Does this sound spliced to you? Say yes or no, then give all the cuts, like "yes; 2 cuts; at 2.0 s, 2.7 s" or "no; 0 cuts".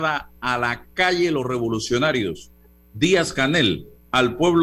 no; 0 cuts